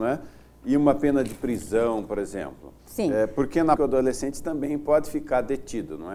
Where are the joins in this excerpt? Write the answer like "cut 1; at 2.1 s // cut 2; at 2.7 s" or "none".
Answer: cut 1; at 2.8 s // cut 2; at 3.8 s